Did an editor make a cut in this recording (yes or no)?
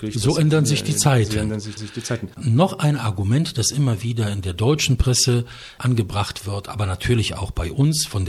yes